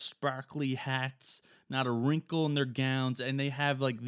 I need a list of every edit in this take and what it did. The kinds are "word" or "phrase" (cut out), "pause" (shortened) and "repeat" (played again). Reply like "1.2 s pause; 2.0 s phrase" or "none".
none